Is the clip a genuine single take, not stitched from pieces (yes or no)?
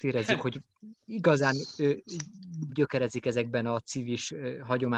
no